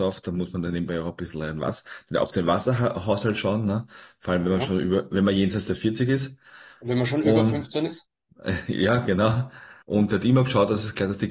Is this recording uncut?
no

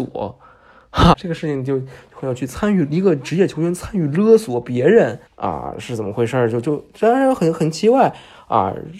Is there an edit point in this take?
yes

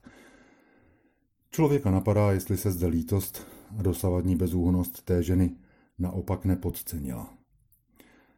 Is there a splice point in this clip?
no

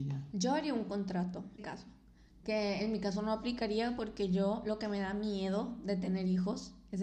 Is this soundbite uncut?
no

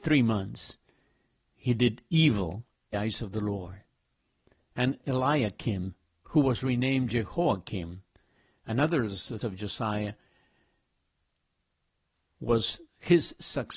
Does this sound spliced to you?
yes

